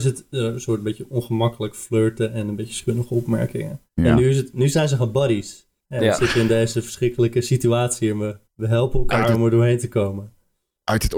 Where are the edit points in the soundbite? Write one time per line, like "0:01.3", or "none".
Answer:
0:03.9
0:05.8
0:08.4

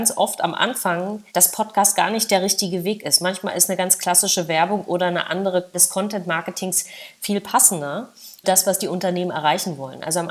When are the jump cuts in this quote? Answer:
0:01.3
0:05.7
0:08.4

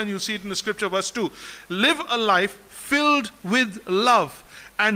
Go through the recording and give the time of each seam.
none

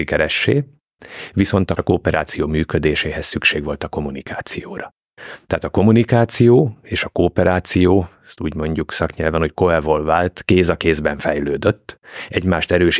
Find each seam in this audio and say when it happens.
0:01.8

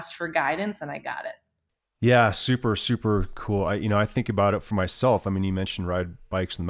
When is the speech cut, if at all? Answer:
0:01.7

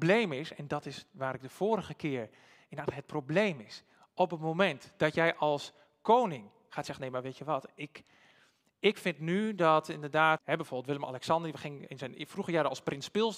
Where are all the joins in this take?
0:10.4
0:11.9

